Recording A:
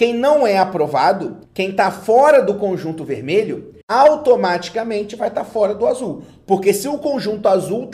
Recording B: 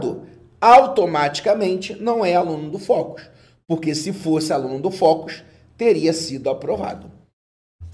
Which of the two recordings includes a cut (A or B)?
A